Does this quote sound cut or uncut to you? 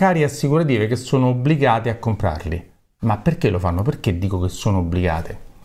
uncut